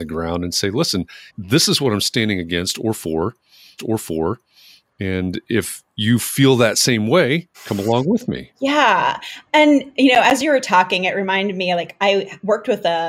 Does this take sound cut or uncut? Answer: cut